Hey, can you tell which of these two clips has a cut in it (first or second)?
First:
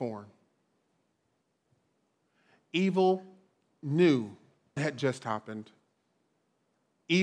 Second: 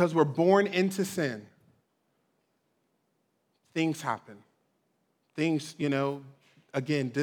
first